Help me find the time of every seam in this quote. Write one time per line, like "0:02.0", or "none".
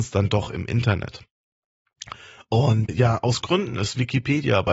0:02.9
0:03.4